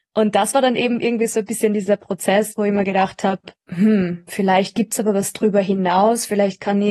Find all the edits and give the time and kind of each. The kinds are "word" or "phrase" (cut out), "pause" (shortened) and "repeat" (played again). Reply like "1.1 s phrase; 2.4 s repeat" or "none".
3.6 s pause

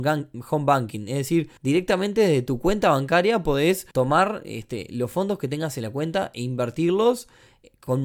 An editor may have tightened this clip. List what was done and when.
1.6 s pause; 3.9 s pause

